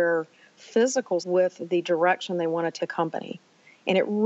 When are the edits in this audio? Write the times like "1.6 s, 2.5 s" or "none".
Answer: 1.2 s, 2.8 s